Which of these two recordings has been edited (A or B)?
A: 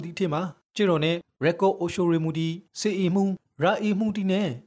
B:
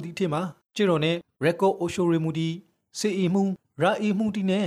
A